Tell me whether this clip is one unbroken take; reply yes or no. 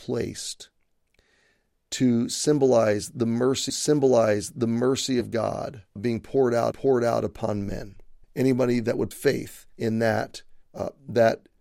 no